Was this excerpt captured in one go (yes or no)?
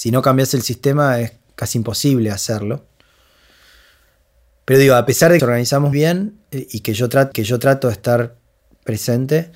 no